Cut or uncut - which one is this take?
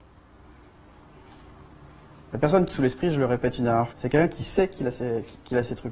cut